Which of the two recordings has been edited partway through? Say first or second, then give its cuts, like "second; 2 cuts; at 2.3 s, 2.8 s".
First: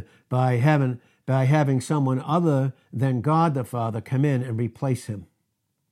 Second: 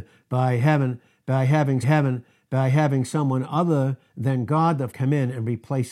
second; 2 cuts; at 1.8 s, 4.9 s